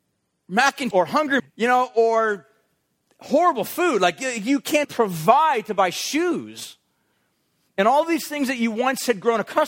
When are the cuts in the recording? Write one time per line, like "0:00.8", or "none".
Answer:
0:00.9
0:01.4
0:04.8